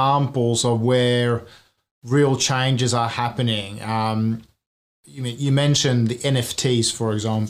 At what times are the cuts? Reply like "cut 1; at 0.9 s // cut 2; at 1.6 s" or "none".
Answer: none

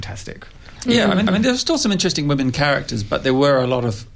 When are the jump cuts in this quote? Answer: cut 1; at 1.3 s

